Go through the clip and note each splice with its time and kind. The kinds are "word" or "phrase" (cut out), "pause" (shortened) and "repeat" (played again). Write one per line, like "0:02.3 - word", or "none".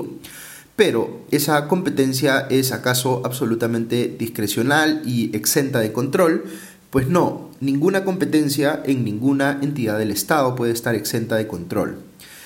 none